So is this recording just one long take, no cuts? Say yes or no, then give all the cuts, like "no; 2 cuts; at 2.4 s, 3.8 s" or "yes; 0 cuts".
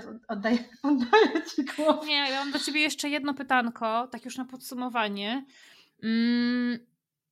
yes; 0 cuts